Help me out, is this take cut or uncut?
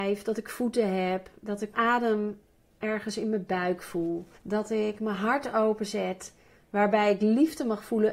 cut